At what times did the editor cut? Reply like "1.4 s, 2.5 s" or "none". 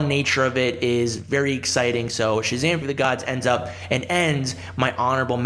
2.8 s

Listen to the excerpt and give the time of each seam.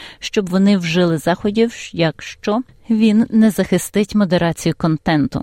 none

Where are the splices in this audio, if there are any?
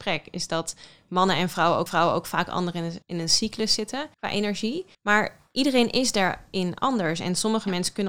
1.9 s, 3.0 s, 4.1 s, 4.9 s

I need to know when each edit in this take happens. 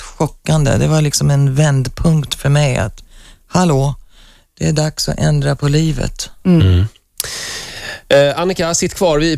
none

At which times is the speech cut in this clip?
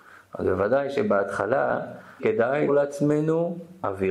2.2 s, 2.7 s

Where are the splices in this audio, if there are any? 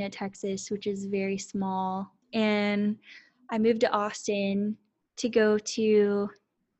2.2 s

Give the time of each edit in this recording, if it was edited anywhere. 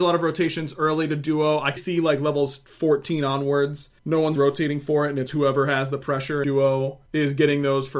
1.8 s, 4.0 s, 4.4 s, 5.3 s, 6.4 s, 7.1 s

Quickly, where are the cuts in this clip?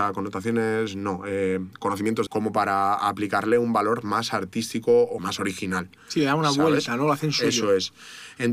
2.3 s, 5.2 s

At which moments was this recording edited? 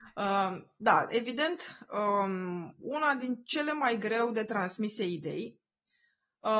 none

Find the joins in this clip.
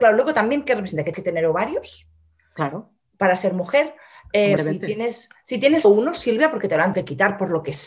1.1 s, 4.6 s, 5.8 s, 6.9 s

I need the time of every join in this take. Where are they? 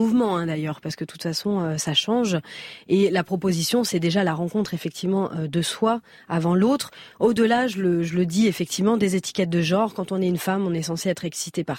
none

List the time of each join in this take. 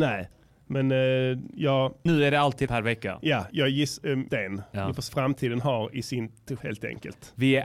2.1 s, 2.7 s, 3.5 s, 4.3 s, 5.1 s, 6.6 s

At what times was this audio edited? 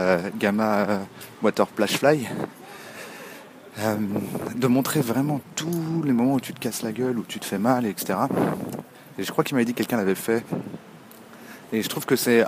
none

